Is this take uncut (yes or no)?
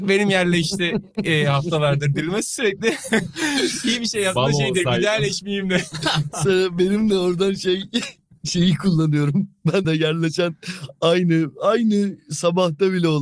no